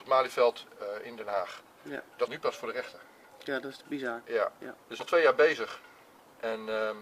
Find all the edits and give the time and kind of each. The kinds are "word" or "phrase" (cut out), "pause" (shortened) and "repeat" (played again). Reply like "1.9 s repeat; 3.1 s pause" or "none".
2.3 s word; 5.0 s word